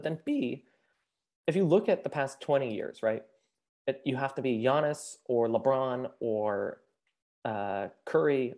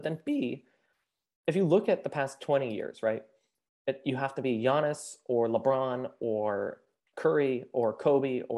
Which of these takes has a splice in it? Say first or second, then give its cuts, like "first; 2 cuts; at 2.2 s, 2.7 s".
second; 1 cut; at 7.1 s